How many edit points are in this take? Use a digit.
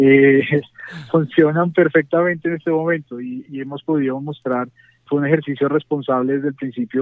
2